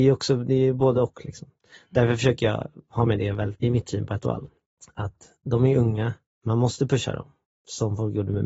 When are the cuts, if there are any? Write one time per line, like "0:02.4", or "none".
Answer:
0:03.1
0:03.6